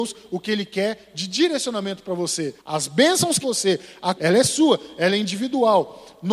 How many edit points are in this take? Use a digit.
3